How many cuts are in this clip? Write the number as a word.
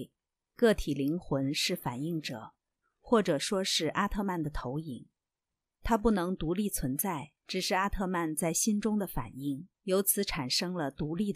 two